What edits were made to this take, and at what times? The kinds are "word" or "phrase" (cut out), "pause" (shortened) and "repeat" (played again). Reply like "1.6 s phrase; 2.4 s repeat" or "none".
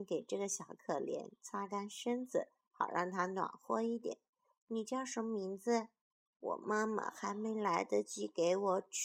none